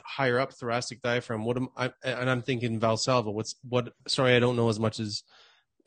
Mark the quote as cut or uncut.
cut